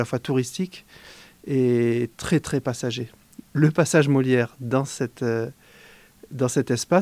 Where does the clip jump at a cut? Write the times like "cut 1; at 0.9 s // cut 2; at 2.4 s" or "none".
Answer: none